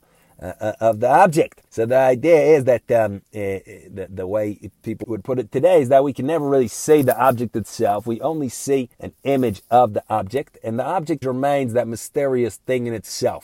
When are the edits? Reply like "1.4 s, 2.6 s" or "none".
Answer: 1.7 s, 5.0 s, 8.9 s, 11.2 s